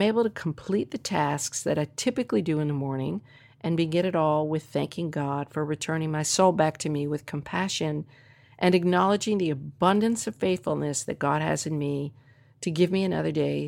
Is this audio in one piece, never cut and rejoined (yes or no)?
yes